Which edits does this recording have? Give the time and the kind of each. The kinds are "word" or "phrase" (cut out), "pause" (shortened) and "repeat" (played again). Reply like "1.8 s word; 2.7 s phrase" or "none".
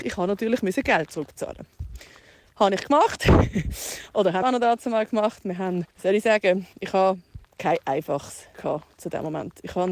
1.1 s word; 4.4 s word; 5.9 s pause; 6.7 s pause; 7.5 s pause; 8.5 s word